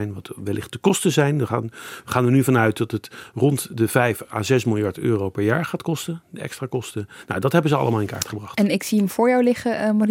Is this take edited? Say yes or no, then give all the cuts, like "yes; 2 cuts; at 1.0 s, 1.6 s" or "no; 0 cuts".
no; 0 cuts